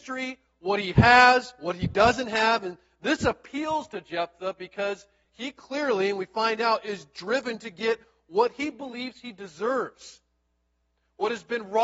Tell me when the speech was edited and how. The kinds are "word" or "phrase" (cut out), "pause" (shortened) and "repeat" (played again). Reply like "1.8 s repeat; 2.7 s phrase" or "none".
none